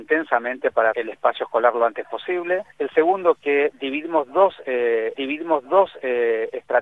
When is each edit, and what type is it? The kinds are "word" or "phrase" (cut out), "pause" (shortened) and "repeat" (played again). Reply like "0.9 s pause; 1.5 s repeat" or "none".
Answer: 0.9 s phrase; 2.7 s pause; 5.1 s repeat